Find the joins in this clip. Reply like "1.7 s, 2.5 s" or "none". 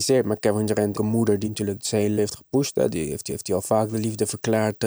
0.9 s, 1.4 s, 2.2 s, 3.3 s

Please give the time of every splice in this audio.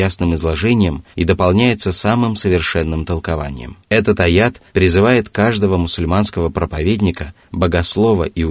1.1 s, 3.8 s, 4.7 s

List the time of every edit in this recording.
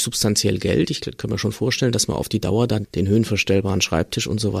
2.8 s

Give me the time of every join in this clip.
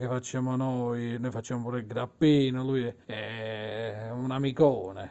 3.0 s

